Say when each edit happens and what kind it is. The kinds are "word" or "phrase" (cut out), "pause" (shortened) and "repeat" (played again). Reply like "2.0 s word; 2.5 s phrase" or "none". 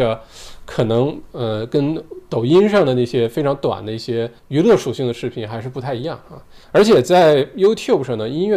4.4 s pause; 6.6 s pause